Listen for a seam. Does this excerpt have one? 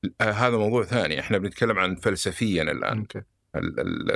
no; 0 cuts

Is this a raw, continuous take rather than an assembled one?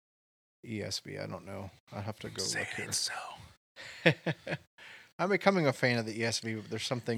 yes; 0 cuts

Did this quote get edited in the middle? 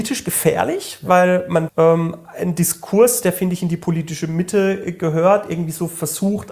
yes; 1 cut; at 1.7 s

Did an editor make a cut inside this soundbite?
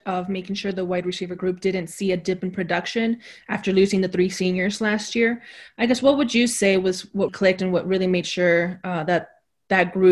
yes; 1 cut; at 7.3 s

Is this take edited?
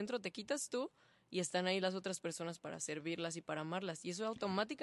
no; 0 cuts

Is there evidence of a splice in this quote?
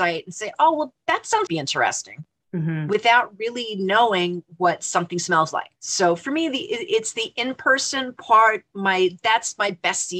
yes; 2 cuts; at 1.5 s, 5.8 s

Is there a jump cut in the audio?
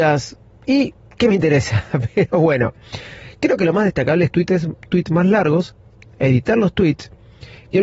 yes; 1 cut; at 4.3 s

